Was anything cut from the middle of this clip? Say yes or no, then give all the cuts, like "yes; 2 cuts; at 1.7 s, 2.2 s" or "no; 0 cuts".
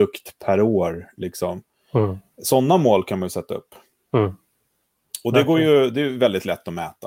no; 0 cuts